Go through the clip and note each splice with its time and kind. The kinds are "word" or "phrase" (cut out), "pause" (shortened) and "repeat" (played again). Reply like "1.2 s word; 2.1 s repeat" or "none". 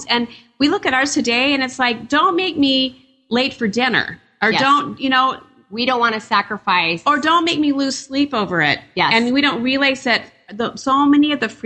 none